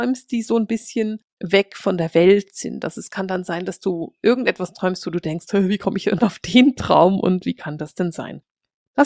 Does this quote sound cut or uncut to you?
uncut